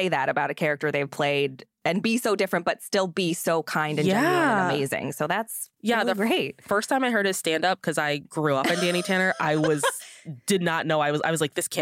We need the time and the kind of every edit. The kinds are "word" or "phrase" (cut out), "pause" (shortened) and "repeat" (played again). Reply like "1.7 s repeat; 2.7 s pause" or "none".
5.7 s pause